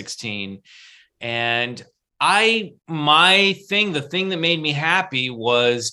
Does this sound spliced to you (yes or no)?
yes